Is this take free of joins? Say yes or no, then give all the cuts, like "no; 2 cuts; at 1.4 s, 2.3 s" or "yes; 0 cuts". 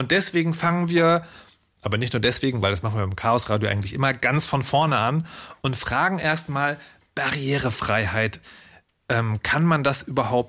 yes; 0 cuts